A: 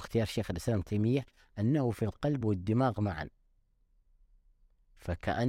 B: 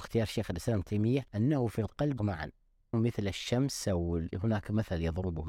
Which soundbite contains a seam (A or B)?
B